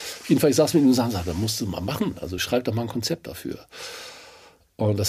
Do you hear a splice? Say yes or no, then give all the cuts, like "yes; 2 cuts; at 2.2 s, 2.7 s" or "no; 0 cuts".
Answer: no; 0 cuts